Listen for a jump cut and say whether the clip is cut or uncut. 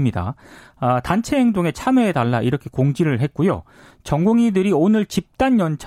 uncut